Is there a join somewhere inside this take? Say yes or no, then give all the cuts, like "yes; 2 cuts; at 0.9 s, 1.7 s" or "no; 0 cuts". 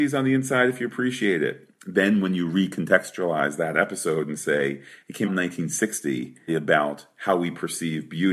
yes; 2 cuts; at 5.2 s, 6.5 s